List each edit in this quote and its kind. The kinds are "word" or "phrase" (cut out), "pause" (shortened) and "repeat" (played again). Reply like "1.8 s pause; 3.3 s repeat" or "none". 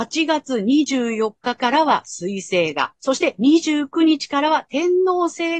3.0 s pause

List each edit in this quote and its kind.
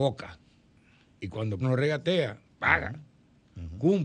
1.6 s word

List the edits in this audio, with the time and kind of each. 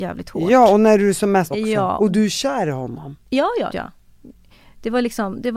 1.5 s word; 3.7 s word

